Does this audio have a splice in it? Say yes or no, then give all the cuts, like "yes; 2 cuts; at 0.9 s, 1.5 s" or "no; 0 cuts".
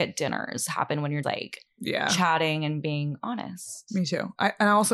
yes; 1 cut; at 1.2 s